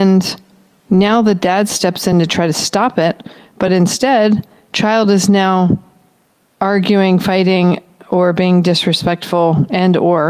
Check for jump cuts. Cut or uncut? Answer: uncut